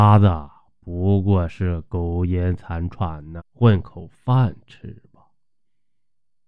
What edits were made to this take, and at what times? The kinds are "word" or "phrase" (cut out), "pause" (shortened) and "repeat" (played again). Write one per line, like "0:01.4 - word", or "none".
0:03.4 - word